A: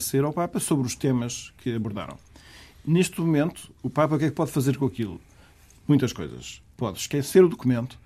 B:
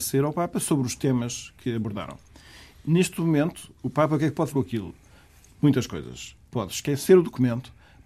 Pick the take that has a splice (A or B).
B